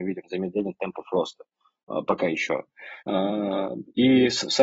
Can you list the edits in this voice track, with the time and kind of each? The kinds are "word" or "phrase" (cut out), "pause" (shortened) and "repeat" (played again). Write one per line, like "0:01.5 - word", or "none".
0:03.0 - pause